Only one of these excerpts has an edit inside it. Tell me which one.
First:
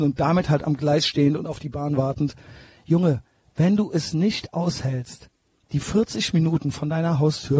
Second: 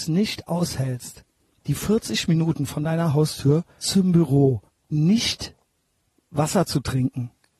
second; 2 cuts; at 3.8 s, 4.7 s

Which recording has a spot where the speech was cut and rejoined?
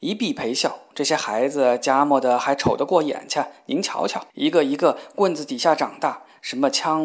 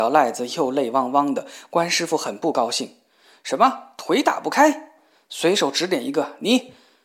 first; 1 cut; at 4.3 s

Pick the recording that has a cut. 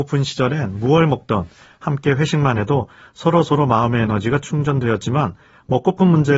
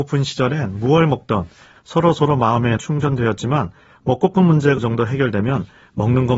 second; 3 cuts; at 1.8 s, 2.8 s, 4.8 s

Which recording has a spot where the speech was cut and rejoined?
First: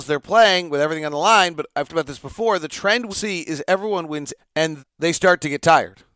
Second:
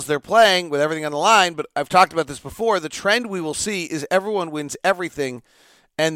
first; 4 cuts; at 1.9 s, 3.1 s, 4.4 s, 4.8 s

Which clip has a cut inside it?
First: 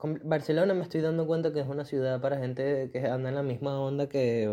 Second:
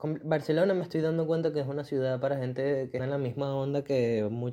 second; 1 cut; at 3.0 s

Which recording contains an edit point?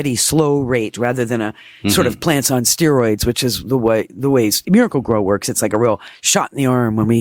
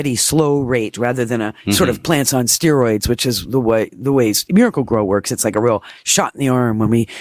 second; 1 cut; at 1.6 s

